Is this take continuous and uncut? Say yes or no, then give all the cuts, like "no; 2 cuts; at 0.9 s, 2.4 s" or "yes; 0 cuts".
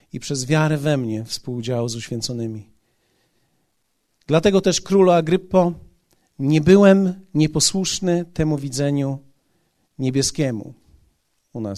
yes; 0 cuts